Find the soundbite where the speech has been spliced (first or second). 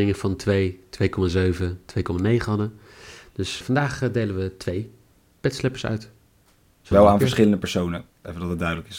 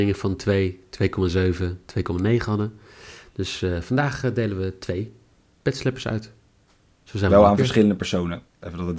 first